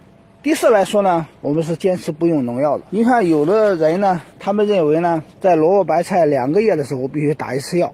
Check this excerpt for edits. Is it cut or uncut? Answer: cut